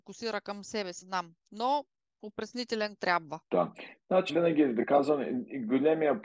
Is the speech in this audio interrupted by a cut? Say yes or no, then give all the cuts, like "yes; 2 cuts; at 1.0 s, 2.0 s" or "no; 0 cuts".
yes; 5 cuts; at 1.0 s, 1.4 s, 3.0 s, 3.5 s, 4.3 s